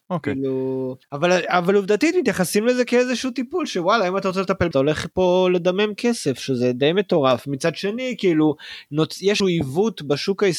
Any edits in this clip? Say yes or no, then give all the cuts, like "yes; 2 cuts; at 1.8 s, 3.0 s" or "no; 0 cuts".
yes; 3 cuts; at 1.0 s, 4.7 s, 9.4 s